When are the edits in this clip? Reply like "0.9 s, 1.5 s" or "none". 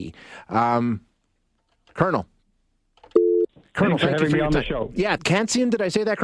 3.5 s, 5.2 s